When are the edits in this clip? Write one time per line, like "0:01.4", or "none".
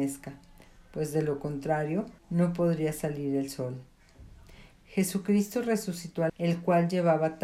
0:02.2
0:06.3